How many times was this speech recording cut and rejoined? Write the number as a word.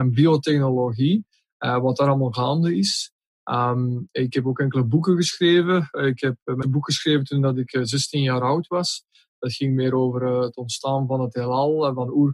one